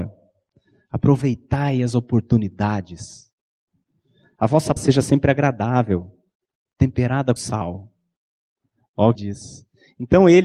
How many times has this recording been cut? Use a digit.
3